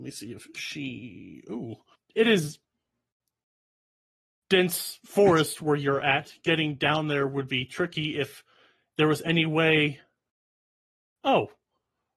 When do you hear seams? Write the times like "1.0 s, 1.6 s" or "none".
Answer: none